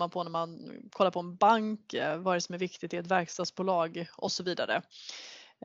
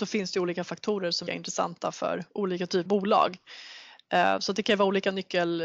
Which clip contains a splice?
second; 2 cuts; at 1.3 s, 2.9 s

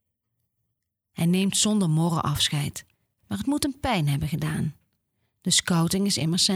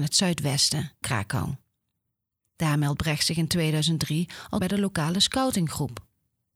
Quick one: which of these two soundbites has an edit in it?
second; 2 cuts; at 1.0 s, 4.6 s

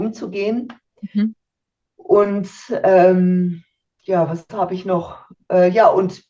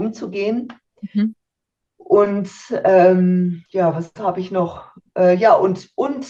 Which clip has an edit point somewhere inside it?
second; 1 cut; at 3.7 s

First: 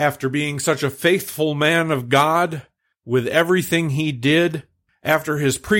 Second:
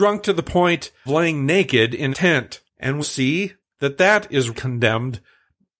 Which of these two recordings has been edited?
second; 6 cuts; at 1.1 s, 2.1 s, 2.7 s, 3.0 s, 3.6 s, 4.5 s

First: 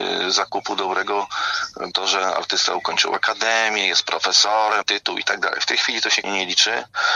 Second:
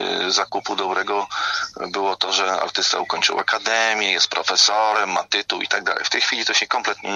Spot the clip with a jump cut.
first; 3 cuts; at 1.9 s, 4.8 s, 6.2 s

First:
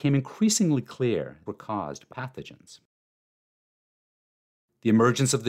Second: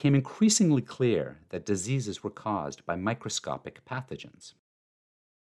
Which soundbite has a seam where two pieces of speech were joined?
first; 2 cuts; at 1.5 s, 2.1 s

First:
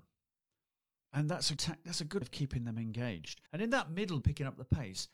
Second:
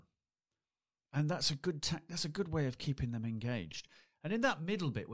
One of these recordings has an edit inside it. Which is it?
first; 4 cuts; at 1.6 s, 2.2 s, 3.5 s, 4.2 s

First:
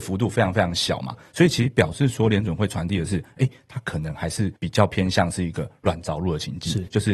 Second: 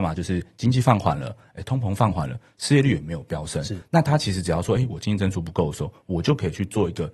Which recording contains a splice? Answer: first; 1 cut; at 4.6 s

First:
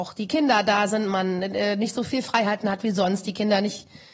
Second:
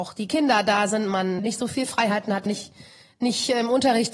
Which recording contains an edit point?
second; 2 cuts; at 1.4 s, 2.5 s

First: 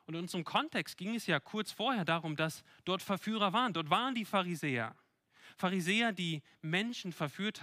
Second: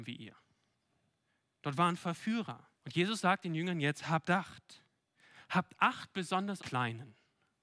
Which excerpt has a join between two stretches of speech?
second; 2 cuts; at 2.7 s, 6.6 s

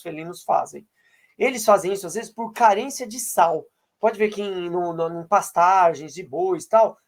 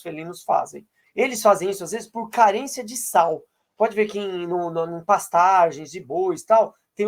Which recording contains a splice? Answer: second; 1 cut; at 1.0 s

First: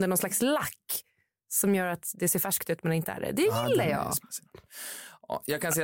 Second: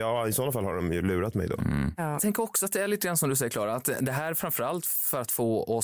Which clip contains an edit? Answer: second; 1 cut; at 2.2 s

